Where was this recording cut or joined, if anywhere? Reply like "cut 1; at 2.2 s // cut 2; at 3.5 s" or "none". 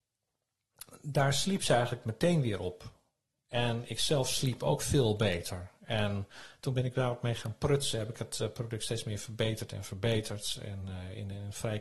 none